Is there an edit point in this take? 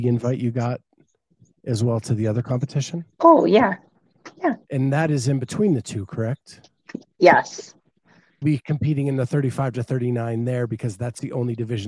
yes; 3 cuts; at 3.1 s, 4.6 s, 8.4 s

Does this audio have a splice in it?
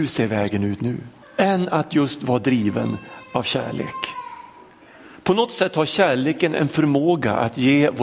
yes; 1 cut; at 1.2 s

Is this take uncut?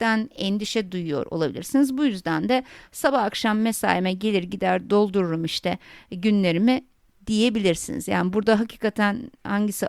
yes; 0 cuts

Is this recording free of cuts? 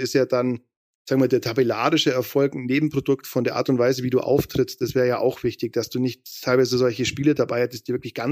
yes; 0 cuts

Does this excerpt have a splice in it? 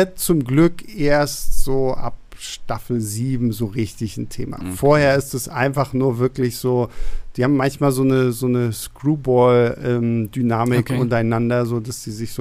no; 0 cuts

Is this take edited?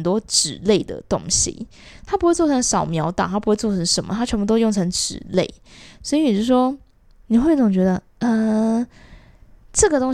yes; 1 cut; at 8.1 s

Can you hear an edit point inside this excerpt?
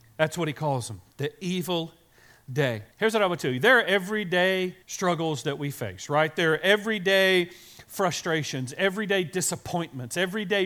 yes; 2 cuts; at 2.9 s, 4.8 s

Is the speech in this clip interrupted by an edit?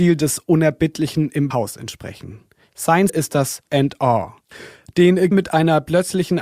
yes; 4 cuts; at 1.5 s, 3.1 s, 3.7 s, 5.3 s

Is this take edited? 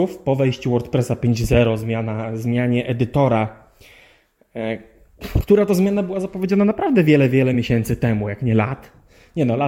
no; 0 cuts

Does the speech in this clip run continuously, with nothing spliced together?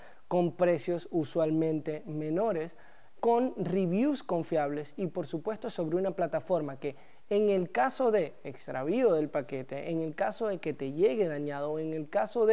no; 1 cut; at 3.2 s

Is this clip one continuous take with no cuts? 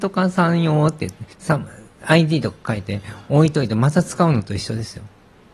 no; 1 cut; at 1.3 s

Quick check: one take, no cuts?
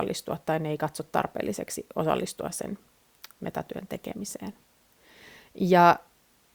yes; 0 cuts

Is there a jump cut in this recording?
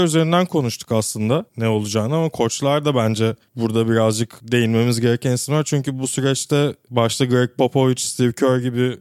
yes; 1 cut; at 1.5 s

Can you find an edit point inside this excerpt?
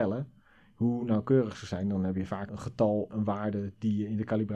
yes; 2 cuts; at 2.5 s, 3.1 s

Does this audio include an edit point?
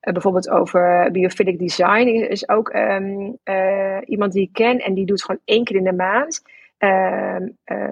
no; 0 cuts

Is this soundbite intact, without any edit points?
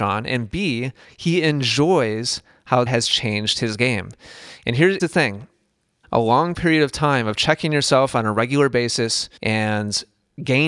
no; 5 cuts; at 1.0 s, 2.9 s, 5.0 s, 6.0 s, 9.4 s

